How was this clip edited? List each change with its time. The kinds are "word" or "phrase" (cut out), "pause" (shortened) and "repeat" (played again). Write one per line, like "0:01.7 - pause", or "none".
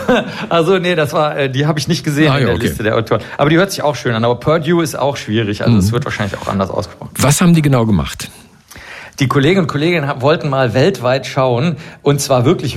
none